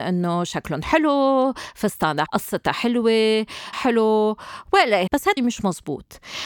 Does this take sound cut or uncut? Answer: cut